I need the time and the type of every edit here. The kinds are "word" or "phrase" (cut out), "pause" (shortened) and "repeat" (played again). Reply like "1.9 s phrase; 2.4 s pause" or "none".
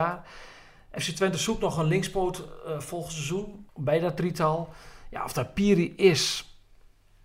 3.7 s pause